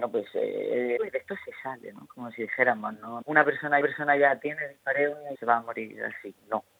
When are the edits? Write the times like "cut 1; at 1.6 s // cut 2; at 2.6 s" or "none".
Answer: cut 1; at 1.0 s // cut 2; at 3.2 s // cut 3; at 3.8 s // cut 4; at 5.3 s